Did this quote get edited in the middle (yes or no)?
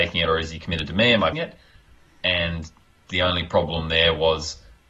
yes